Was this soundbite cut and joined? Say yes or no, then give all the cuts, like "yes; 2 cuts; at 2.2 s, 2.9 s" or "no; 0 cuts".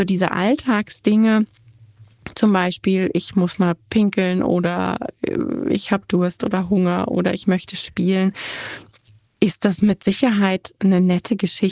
no; 0 cuts